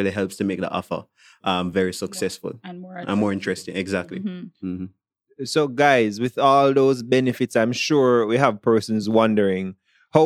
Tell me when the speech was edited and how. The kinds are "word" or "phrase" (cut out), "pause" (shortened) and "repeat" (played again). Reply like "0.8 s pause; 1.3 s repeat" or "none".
none